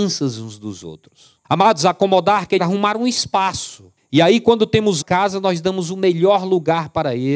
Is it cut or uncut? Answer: cut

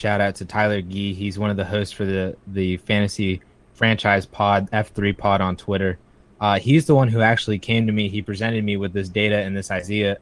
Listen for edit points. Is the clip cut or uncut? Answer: uncut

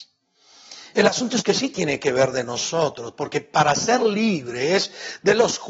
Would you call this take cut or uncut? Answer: uncut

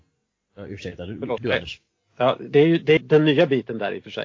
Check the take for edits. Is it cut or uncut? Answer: cut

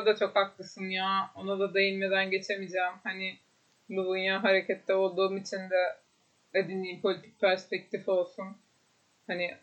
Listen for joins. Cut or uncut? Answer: uncut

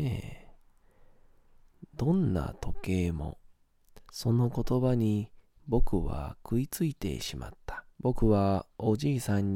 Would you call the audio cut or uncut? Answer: cut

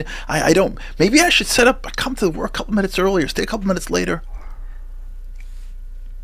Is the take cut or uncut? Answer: uncut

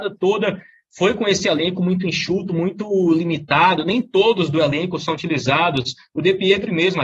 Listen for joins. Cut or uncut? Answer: uncut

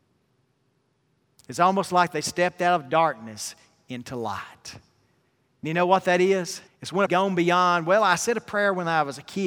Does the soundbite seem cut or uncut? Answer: cut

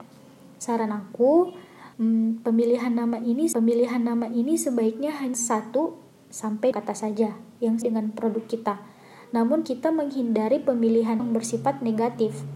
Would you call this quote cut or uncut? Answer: cut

